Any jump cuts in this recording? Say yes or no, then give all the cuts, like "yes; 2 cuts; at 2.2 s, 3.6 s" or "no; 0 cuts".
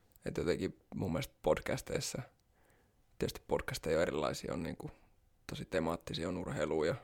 no; 0 cuts